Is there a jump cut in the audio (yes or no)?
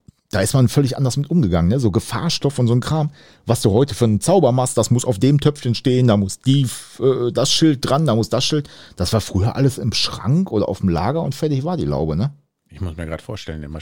no